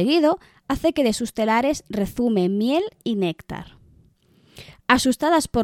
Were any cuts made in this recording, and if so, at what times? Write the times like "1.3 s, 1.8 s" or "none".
none